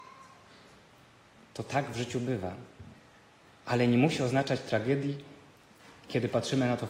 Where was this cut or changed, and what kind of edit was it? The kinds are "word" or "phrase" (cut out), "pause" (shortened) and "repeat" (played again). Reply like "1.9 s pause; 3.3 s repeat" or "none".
none